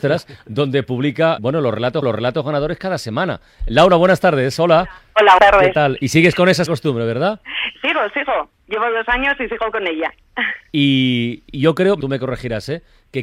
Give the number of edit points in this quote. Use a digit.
5